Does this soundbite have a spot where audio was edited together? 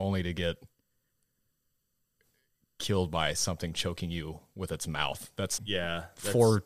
yes; 1 cut; at 5.6 s

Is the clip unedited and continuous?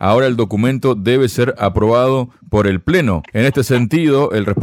yes; 0 cuts

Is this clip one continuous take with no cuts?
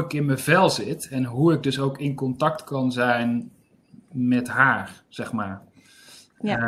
yes; 0 cuts

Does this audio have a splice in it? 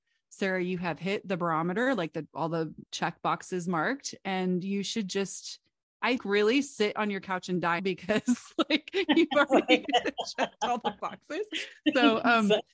yes; 3 cuts; at 2.9 s, 6.2 s, 7.8 s

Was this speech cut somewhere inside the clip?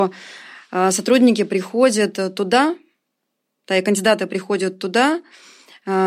no; 0 cuts

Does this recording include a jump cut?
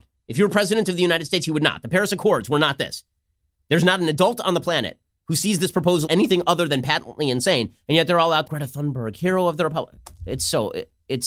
yes; 2 cuts; at 6.1 s, 8.5 s

